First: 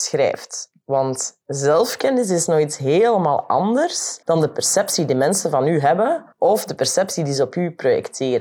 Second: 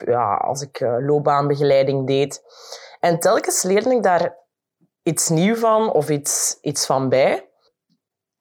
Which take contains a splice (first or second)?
first